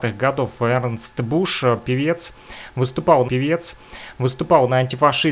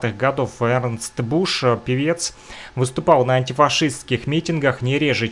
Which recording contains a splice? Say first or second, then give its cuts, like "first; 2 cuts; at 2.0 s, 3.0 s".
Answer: first; 1 cut; at 3.3 s